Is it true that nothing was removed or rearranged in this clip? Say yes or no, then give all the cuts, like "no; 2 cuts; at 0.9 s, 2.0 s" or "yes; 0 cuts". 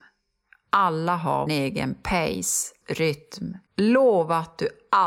no; 3 cuts; at 1.5 s, 2.8 s, 3.7 s